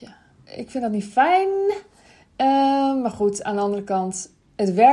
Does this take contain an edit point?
no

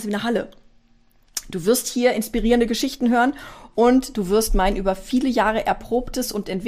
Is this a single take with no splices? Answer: yes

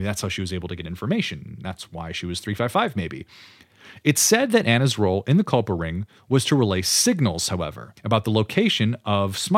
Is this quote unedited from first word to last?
no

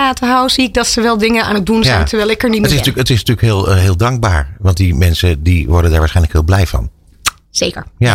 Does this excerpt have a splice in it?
no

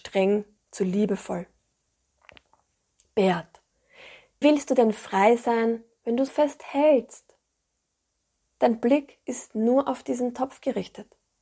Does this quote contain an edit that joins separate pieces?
yes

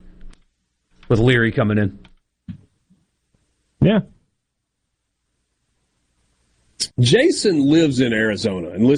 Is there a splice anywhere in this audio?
yes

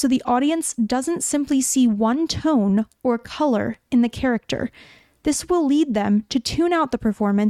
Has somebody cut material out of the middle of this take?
no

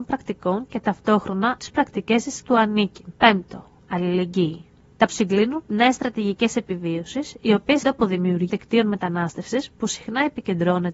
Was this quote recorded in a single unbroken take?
no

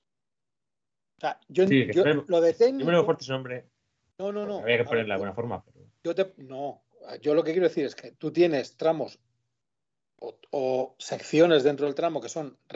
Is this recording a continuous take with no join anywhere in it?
yes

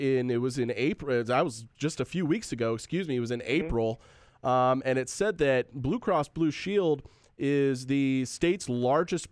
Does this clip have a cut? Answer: no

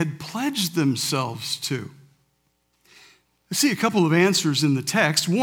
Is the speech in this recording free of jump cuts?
yes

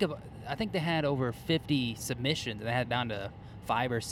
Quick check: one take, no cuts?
no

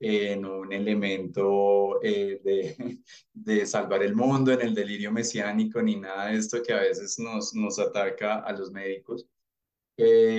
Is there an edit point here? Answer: yes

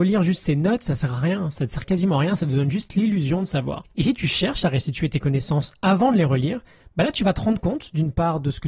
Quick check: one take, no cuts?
yes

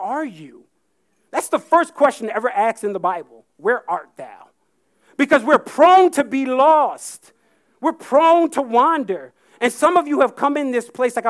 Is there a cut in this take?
no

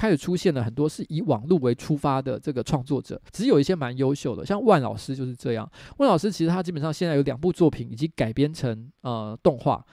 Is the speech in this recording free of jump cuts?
no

